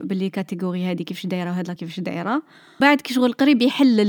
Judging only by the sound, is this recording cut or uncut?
cut